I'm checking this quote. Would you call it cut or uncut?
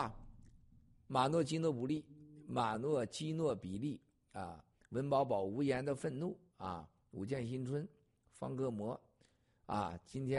uncut